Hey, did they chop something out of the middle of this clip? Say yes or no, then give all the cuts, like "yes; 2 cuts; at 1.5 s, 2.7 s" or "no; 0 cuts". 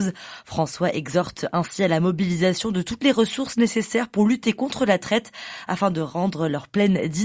no; 0 cuts